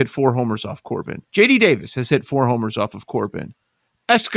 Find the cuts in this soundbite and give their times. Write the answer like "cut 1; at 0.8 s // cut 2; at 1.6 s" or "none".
cut 1; at 1.3 s